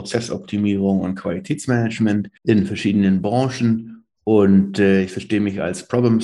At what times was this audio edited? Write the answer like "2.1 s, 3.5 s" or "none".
2.4 s

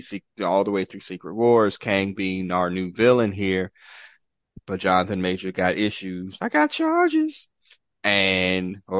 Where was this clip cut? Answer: none

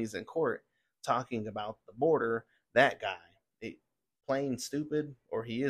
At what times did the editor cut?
none

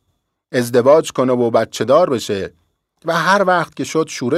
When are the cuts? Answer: none

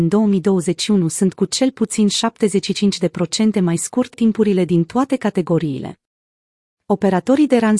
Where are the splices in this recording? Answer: 4.1 s

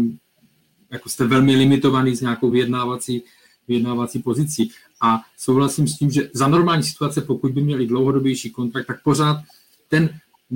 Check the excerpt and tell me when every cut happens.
none

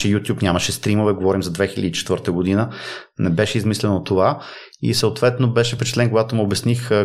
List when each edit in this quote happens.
none

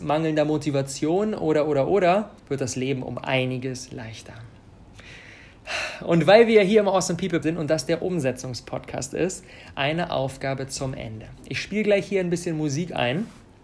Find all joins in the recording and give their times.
2.4 s, 7.4 s

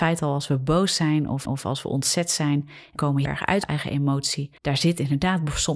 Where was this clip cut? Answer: 1.5 s, 3.0 s, 3.3 s, 3.6 s, 4.6 s

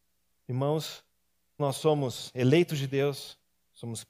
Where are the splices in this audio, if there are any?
1.6 s

